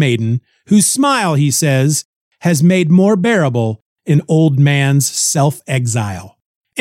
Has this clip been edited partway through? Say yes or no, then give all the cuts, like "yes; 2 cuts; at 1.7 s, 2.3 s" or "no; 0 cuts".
no; 0 cuts